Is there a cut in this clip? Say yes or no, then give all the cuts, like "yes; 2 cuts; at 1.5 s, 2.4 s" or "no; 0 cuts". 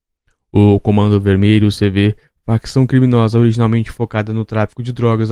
no; 0 cuts